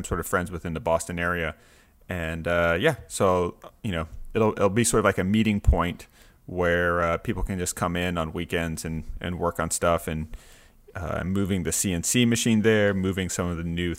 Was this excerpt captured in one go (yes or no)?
yes